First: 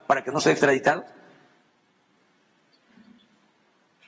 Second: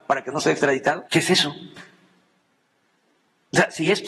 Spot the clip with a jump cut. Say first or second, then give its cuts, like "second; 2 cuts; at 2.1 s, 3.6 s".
second; 1 cut; at 1.1 s